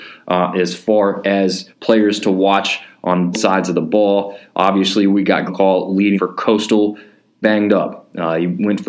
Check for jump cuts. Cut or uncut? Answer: cut